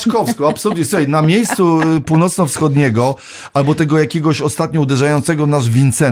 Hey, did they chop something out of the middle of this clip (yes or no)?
no